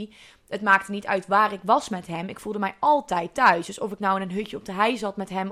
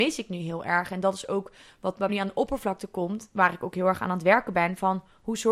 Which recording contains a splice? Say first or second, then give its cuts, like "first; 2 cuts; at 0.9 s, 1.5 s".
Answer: second; 1 cut; at 2.1 s